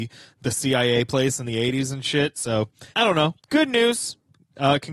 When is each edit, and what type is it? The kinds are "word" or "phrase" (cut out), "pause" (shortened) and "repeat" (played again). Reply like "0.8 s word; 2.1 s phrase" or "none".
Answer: 1.1 s phrase; 2.9 s pause; 3.4 s pause